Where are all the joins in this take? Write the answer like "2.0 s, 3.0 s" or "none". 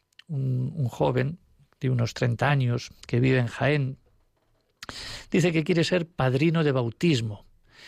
none